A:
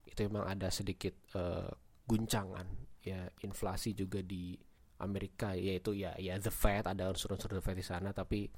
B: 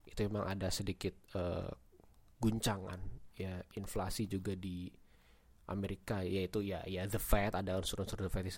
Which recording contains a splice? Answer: A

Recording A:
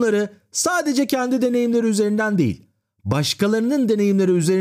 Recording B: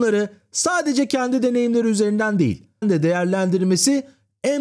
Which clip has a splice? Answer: B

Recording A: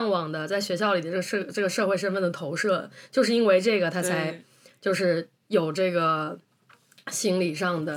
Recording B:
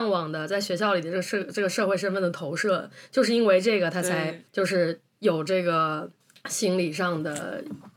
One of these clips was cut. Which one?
B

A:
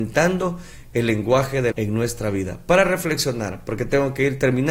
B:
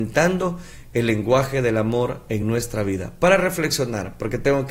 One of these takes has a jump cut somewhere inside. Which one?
A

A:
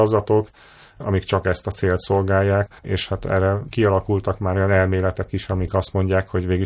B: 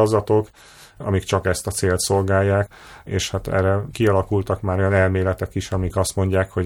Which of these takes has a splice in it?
A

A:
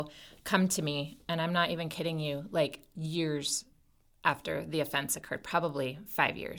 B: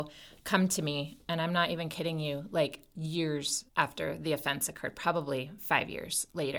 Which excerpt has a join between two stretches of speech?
B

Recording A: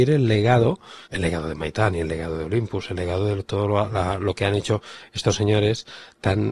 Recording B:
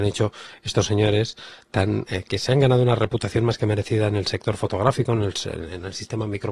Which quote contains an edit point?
A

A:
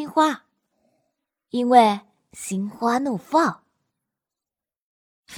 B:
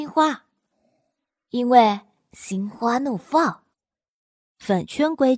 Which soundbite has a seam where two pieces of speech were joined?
B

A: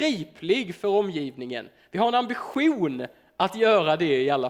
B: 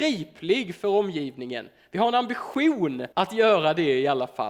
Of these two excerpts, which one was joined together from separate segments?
B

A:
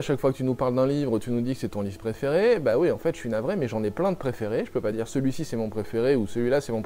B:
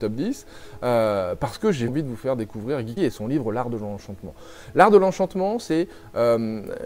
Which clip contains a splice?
B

